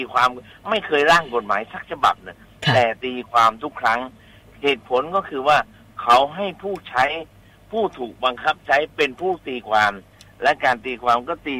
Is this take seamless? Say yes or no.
yes